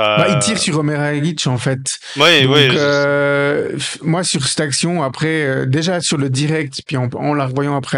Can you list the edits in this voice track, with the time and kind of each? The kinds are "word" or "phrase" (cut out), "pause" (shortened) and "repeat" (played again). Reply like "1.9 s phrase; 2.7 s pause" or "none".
none